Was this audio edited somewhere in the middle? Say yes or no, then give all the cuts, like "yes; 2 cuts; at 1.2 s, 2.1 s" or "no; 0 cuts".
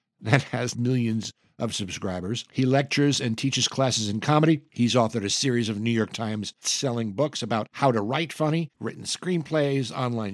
yes; 1 cut; at 6.6 s